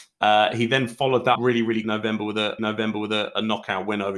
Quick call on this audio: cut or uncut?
cut